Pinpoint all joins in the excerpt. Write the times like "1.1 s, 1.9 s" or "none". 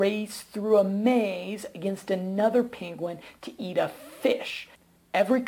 none